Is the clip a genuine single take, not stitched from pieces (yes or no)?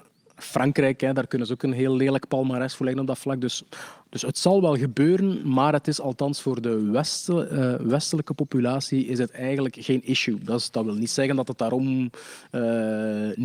yes